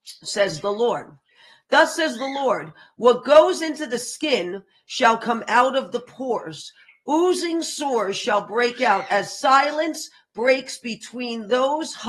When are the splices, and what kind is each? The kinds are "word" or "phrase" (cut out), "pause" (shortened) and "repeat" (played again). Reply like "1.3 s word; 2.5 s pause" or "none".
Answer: none